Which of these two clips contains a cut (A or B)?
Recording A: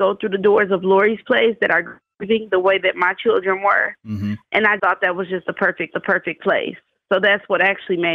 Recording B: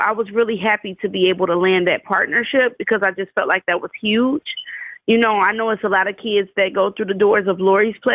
A